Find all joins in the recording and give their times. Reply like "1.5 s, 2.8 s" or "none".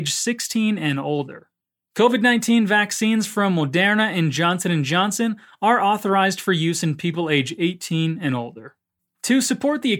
none